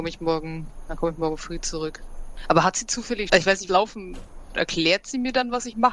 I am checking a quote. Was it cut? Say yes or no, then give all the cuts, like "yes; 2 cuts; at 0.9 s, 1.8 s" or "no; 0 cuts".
yes; 3 cuts; at 3.3 s, 3.7 s, 4.5 s